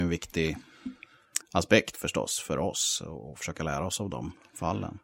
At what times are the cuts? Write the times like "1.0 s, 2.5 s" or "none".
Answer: 1.4 s